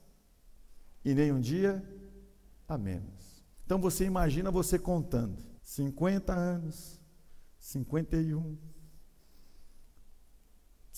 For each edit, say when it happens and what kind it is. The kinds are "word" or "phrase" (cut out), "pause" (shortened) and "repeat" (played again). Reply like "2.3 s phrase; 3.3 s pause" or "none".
3.5 s pause; 5.6 s pause

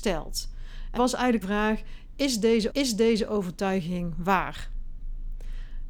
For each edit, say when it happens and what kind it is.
1.0 s word; 1.4 s word; 2.7 s repeat

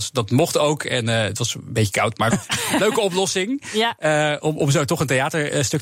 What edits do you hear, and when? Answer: 2.3 s phrase

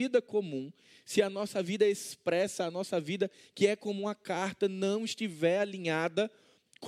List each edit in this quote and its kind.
none

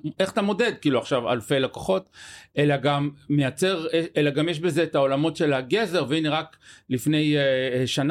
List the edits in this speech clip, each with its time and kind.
none

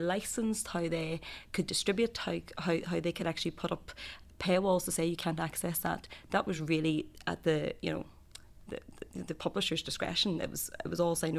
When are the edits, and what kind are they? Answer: none

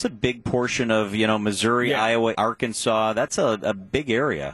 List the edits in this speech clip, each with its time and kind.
2.3 s word

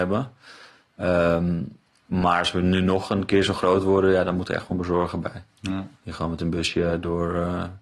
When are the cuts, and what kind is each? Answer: 6.0 s pause

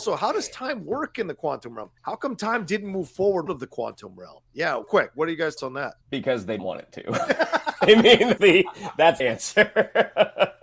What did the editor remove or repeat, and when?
2.0 s pause; 3.5 s phrase; 4.8 s phrase; 5.6 s word; 6.0 s pause; 6.6 s word; 8.4 s word; 9.2 s word

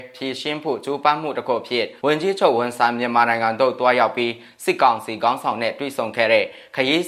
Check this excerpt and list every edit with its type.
2.0 s pause

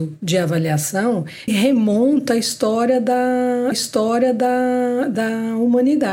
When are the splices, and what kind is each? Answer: 1.5 s word; 3.7 s repeat

